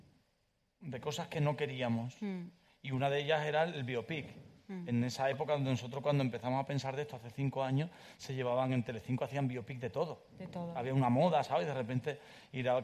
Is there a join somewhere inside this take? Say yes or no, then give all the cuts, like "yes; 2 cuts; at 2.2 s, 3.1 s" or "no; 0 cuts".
no; 0 cuts